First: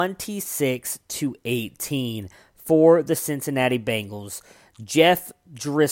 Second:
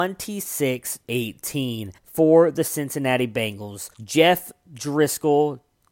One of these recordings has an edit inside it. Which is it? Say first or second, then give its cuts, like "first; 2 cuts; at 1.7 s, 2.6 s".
second; 3 cuts; at 1.0 s, 2.0 s, 3.9 s